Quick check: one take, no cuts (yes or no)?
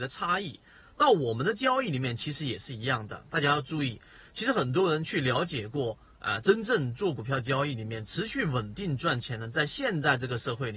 yes